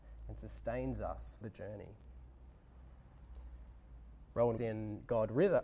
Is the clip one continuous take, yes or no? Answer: no